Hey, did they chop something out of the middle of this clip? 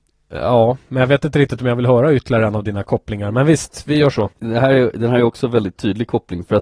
yes; 1 cut; at 4.3 s

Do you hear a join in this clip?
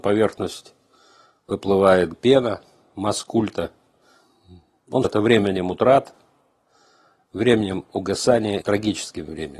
yes; 3 cuts; at 2.1 s, 5.0 s, 8.6 s

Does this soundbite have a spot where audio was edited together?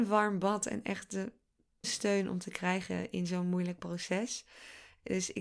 yes; 1 cut; at 1.8 s

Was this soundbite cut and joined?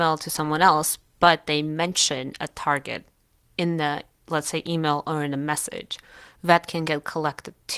no; 0 cuts

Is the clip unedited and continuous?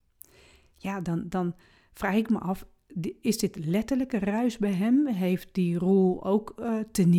yes; 0 cuts

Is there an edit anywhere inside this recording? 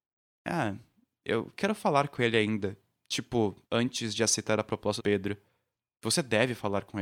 yes; 2 cuts; at 3.6 s, 5.0 s

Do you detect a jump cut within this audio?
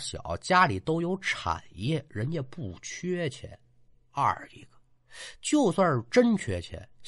no; 0 cuts

